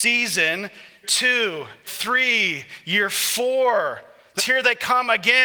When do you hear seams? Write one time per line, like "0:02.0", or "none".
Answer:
0:01.0
0:01.9
0:04.4